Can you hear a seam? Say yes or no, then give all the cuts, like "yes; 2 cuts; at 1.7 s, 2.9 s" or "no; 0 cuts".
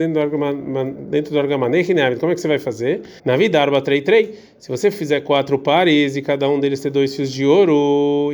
yes; 1 cut; at 3.2 s